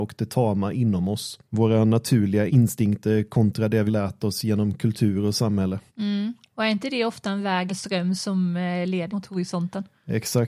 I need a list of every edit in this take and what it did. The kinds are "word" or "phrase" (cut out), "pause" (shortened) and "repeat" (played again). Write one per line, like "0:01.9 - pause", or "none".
0:01.4 - pause
0:02.5 - word
0:03.9 - word
0:05.9 - pause
0:07.7 - word
0:09.1 - word